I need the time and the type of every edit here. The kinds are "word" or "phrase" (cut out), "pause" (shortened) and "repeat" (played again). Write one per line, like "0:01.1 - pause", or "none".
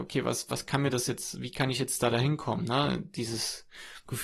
none